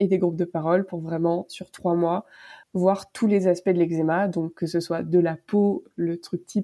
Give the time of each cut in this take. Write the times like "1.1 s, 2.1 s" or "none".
2.6 s